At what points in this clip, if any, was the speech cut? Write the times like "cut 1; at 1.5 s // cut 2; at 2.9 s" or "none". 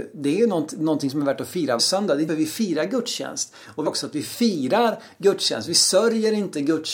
cut 1; at 1.8 s // cut 2; at 2.3 s // cut 3; at 3.9 s